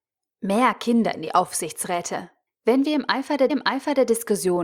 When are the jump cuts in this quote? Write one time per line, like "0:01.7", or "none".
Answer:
0:02.5
0:03.5

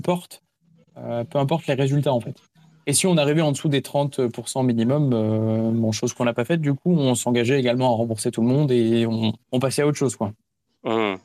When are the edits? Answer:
0:09.4

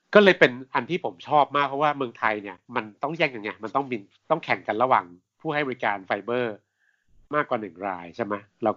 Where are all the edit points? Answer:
0:02.6

